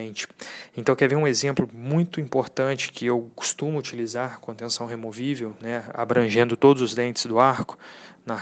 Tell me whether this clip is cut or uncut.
uncut